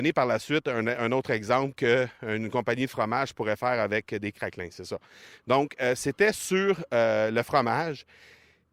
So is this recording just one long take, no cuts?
yes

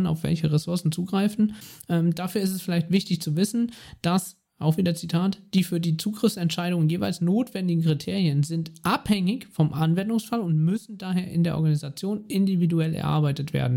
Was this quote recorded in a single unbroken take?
yes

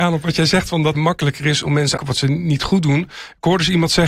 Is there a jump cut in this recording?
yes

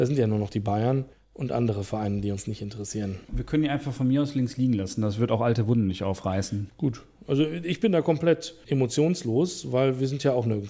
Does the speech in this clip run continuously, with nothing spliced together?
no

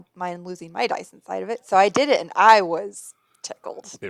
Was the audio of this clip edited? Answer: no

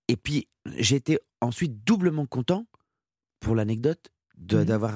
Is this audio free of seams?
yes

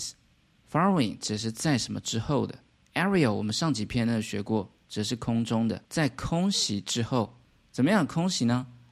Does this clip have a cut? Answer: no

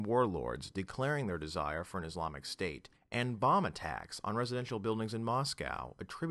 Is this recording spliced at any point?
yes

